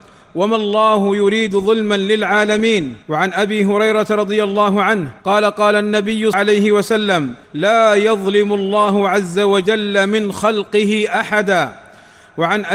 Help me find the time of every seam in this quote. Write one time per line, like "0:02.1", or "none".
0:03.0
0:05.2
0:06.3
0:07.4